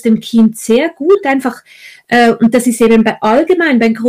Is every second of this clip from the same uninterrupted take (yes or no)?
yes